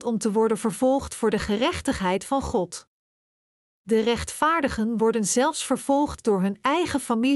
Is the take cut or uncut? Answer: uncut